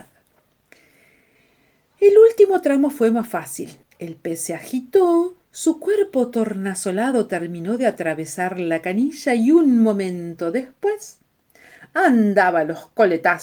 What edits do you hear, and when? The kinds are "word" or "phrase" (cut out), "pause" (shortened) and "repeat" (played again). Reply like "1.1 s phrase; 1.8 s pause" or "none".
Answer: 3.8 s pause; 5.4 s pause